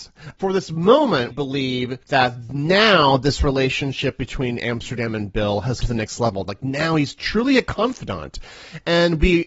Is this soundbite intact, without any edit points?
no; 3 cuts; at 1.3 s, 2.0 s, 5.8 s

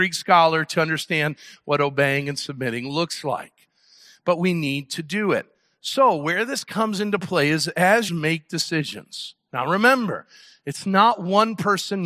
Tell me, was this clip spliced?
yes; 1 cut; at 8.1 s

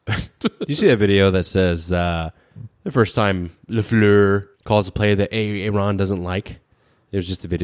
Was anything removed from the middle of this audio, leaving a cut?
yes; 1 cut; at 4.5 s

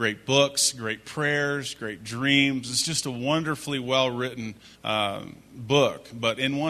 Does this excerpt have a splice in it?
yes; 1 cut; at 4.7 s

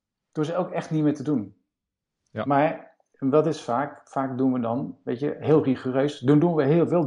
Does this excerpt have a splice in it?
no; 0 cuts

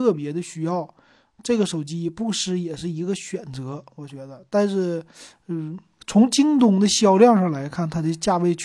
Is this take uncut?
yes; 0 cuts

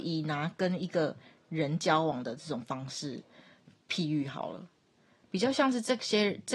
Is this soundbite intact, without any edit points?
yes; 0 cuts

